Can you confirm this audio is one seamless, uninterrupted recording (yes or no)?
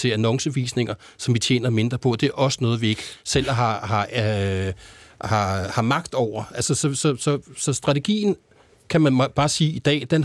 yes